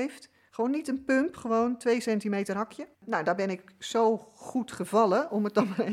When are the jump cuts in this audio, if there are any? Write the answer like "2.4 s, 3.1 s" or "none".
2.9 s